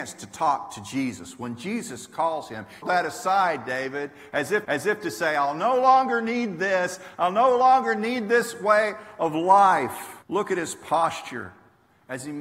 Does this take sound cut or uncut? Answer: cut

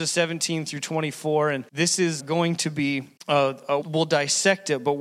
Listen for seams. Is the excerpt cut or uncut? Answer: cut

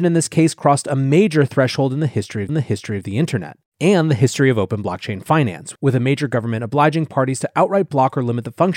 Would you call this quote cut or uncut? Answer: cut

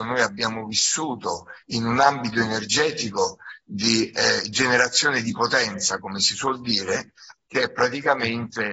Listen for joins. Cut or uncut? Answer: cut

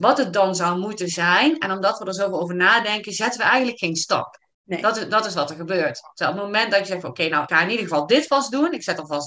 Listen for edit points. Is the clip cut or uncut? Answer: cut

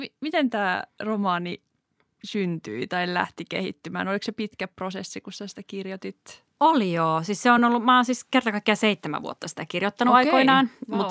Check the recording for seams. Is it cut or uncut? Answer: uncut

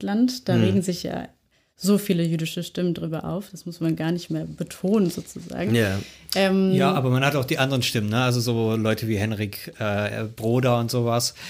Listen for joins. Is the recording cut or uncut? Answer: uncut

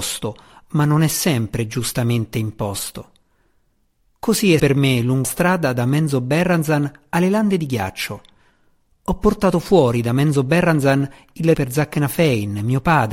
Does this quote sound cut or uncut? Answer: cut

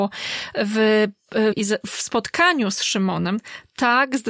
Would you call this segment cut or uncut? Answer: cut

